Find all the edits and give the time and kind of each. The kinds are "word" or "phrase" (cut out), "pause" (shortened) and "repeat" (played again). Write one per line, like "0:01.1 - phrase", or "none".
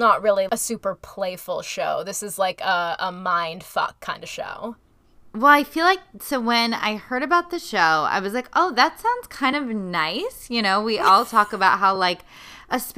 none